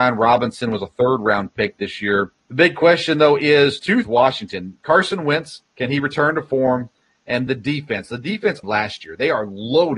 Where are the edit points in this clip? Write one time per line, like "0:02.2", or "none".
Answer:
0:02.4
0:04.0
0:05.7
0:07.5
0:08.6